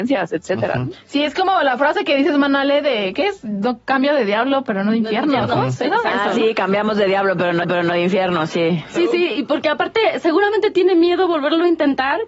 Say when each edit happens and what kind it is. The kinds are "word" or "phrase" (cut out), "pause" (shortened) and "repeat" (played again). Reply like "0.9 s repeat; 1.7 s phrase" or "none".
7.6 s repeat